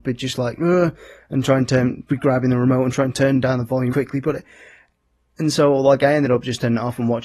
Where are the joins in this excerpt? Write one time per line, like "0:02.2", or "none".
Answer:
0:02.1
0:03.9